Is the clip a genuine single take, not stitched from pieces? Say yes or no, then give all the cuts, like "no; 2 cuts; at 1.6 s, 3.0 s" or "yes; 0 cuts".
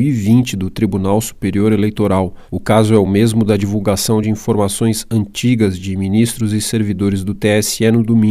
yes; 0 cuts